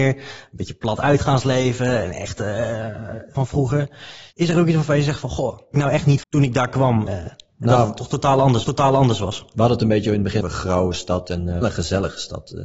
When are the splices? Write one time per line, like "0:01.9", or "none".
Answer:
0:03.3
0:04.3
0:05.7
0:06.2
0:07.1
0:08.6
0:10.4
0:11.6